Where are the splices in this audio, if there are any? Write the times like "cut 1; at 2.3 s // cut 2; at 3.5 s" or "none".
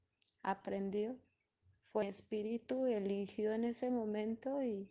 cut 1; at 2.0 s